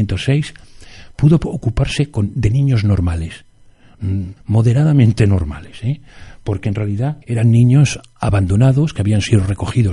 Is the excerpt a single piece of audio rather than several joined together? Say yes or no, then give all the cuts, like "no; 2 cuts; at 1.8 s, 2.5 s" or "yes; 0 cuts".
no; 2 cuts; at 4.4 s, 7.2 s